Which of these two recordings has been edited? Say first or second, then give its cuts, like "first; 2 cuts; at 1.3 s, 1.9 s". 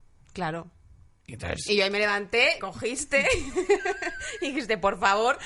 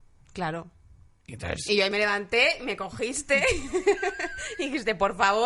first; 1 cut; at 2.6 s